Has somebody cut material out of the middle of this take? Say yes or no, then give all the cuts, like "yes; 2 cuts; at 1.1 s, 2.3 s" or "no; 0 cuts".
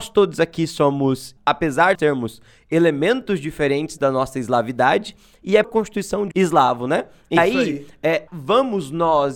yes; 7 cuts; at 1.4 s, 1.9 s, 4.0 s, 5.6 s, 6.3 s, 7.4 s, 8.3 s